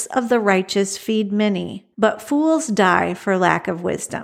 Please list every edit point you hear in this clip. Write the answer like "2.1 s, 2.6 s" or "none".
1.9 s